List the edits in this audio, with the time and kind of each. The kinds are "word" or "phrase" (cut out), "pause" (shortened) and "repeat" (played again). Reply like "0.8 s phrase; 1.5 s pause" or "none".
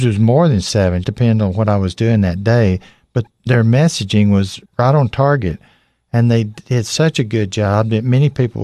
1.0 s word; 3.3 s word; 4.6 s pause

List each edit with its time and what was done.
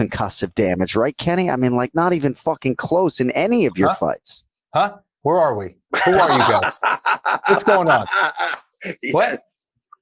none

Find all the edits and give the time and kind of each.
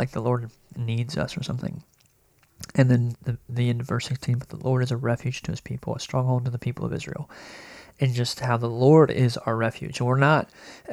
none

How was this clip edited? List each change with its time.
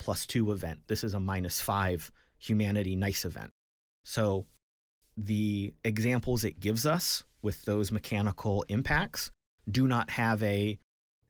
none

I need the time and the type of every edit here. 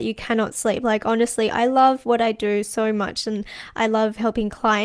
none

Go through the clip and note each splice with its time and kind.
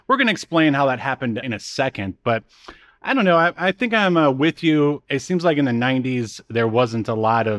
1.4 s word

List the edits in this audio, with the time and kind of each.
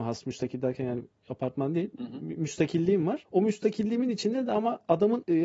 none

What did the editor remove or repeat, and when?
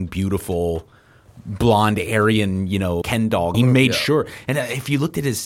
3.0 s word; 3.5 s phrase

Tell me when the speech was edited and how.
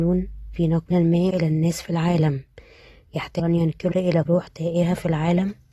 0.9 s word; 1.3 s word; 3.4 s word; 3.9 s word; 4.3 s word

